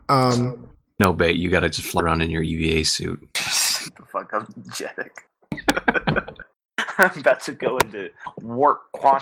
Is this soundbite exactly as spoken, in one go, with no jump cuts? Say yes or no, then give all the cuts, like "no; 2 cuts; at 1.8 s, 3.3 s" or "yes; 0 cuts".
yes; 0 cuts